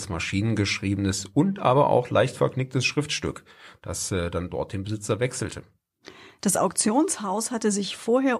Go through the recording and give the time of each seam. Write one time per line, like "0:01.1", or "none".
none

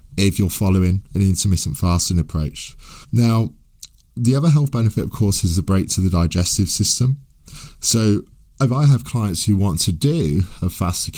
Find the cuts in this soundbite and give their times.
0:03.0

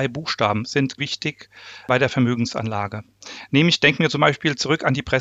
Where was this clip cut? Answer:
0:01.0

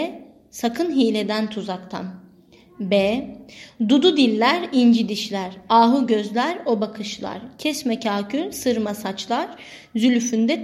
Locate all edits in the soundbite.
none

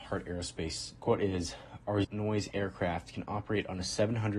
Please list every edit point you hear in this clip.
0:01.0
0:02.0

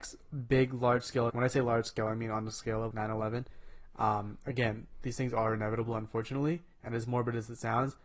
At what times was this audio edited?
0:01.3
0:02.9

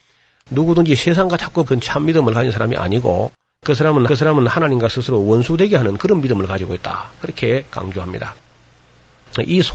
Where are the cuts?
0:01.7
0:03.5
0:04.1

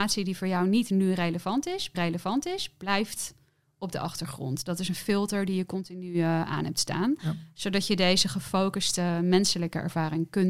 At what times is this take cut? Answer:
0:01.9

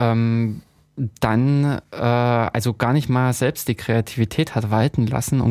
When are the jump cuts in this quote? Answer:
none

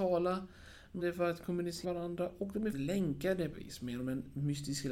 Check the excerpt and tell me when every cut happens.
0:01.0
0:01.8
0:02.7
0:03.5

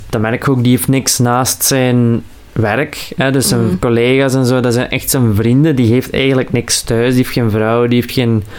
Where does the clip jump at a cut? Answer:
none

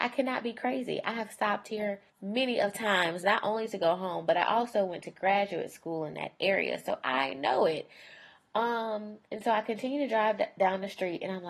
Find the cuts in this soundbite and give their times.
0:02.1
0:09.2

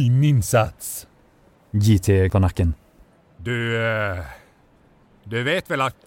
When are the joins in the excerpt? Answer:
0:02.3

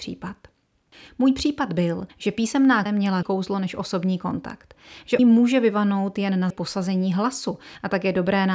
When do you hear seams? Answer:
0:02.1
0:02.9
0:03.2
0:05.2
0:06.5

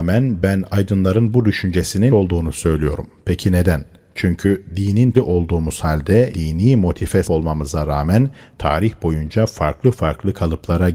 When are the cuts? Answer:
0:02.1
0:05.1
0:06.3
0:07.2

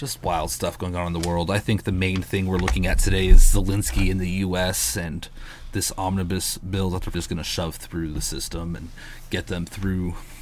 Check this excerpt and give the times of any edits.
0:07.1

